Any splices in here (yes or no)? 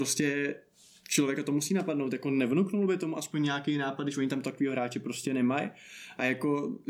no